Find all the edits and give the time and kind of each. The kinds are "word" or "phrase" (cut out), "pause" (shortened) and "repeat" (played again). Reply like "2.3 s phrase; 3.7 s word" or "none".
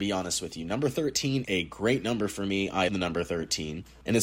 1.4 s word; 2.9 s word